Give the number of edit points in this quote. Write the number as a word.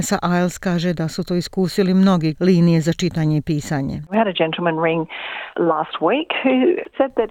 one